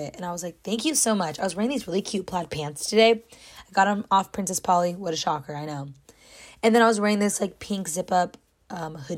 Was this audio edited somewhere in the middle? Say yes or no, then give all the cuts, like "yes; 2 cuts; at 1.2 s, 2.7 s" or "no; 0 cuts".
no; 0 cuts